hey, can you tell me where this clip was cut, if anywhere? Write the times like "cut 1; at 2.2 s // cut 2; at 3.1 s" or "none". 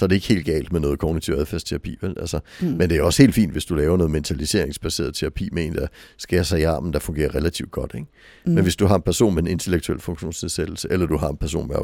none